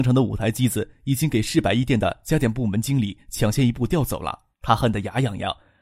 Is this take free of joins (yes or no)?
no